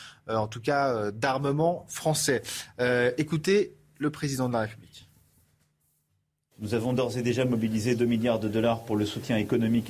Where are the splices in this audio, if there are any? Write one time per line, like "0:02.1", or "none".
none